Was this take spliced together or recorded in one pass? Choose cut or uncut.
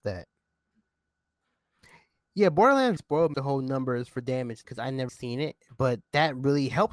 cut